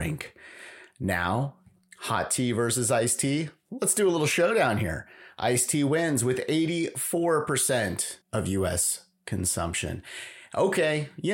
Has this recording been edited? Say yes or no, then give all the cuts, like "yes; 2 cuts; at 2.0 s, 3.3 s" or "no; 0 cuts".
yes; 1 cut; at 8.2 s